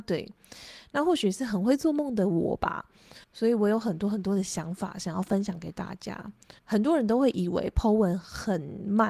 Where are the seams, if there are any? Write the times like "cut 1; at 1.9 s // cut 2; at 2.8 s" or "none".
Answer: cut 1; at 3.2 s // cut 2; at 6.6 s

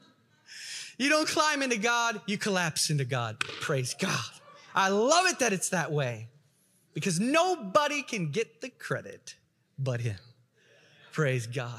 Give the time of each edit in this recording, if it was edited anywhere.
none

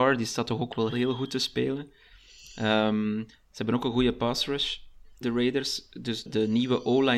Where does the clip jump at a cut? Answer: cut 1; at 0.9 s // cut 2; at 5.2 s // cut 3; at 6.3 s

